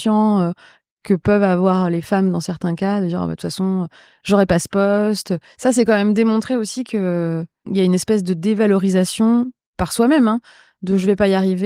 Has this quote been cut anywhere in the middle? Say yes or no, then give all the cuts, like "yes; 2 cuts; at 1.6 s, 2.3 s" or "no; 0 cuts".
no; 0 cuts